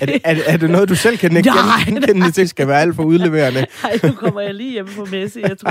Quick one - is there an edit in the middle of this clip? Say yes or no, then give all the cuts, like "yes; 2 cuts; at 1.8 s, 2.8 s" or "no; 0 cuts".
yes; 2 cuts; at 1.9 s, 2.4 s